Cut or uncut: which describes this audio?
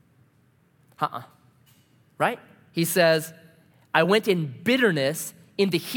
uncut